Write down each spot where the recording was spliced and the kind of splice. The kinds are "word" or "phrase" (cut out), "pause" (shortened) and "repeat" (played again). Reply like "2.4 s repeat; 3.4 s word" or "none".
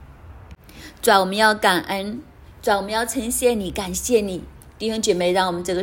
4.6 s pause